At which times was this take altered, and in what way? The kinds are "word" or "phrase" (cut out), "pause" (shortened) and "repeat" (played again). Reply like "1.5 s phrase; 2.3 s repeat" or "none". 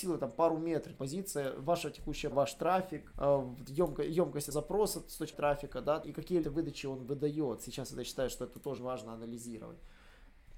1.0 s word; 2.3 s word; 3.1 s word; 3.7 s word; 4.5 s word; 5.3 s word; 6.0 s word; 6.4 s word; 8.8 s word